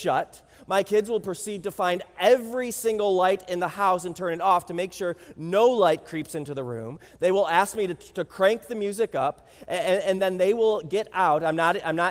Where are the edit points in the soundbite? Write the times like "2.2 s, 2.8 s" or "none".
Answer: none